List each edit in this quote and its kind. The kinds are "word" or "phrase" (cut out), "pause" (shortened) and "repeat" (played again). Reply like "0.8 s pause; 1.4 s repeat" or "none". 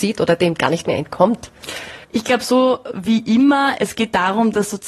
2.0 s pause